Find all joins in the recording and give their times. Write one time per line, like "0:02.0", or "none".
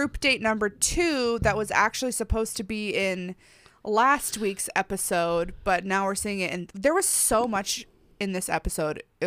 none